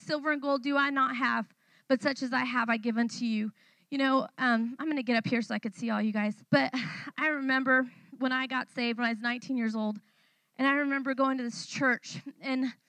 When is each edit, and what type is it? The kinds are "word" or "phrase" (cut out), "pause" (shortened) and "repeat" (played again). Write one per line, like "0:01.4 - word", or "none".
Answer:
0:06.4 - pause

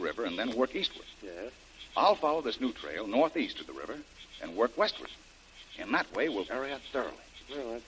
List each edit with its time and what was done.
0:06.5 - phrase

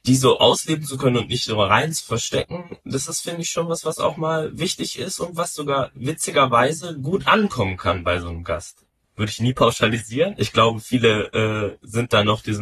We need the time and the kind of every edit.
none

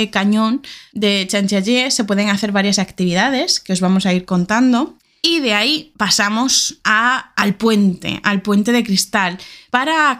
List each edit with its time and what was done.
none

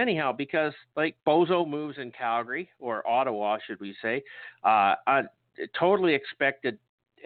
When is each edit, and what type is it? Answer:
0:01.2 - pause

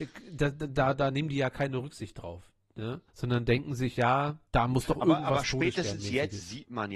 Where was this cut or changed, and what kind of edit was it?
0:03.1 - pause
0:04.5 - pause

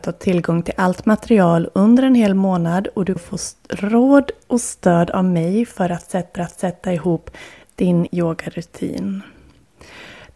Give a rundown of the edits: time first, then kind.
0:03.2 - word
0:06.4 - repeat
0:08.1 - word

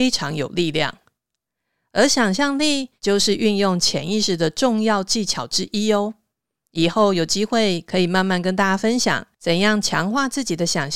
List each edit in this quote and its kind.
none

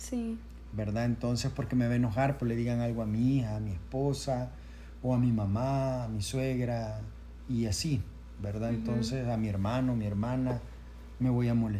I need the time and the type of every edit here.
0:02.4 - word

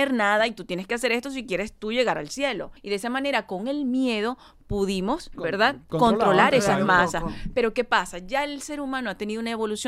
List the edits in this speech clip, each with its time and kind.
0:02.8 - pause
0:05.3 - word

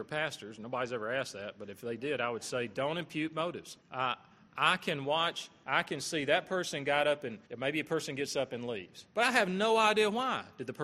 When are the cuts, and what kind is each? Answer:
0:03.8 - pause
0:07.5 - pause
0:09.1 - pause

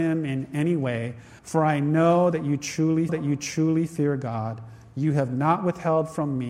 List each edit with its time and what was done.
0:01.4 - pause
0:03.1 - repeat

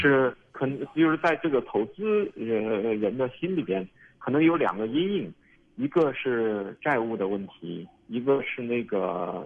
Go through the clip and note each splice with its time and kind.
none

